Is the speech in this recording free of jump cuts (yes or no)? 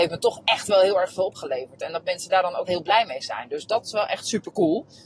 no